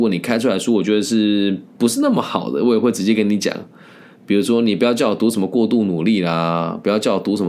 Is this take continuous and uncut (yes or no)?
yes